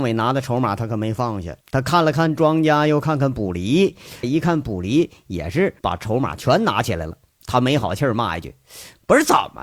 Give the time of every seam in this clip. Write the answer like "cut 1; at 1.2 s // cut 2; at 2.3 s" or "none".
cut 1; at 1.6 s // cut 2; at 4.2 s // cut 3; at 5.8 s